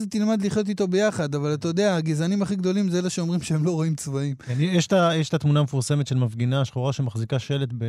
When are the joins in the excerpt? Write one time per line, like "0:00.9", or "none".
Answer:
none